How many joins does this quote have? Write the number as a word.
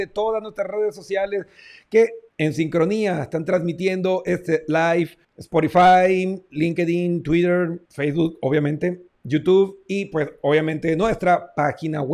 three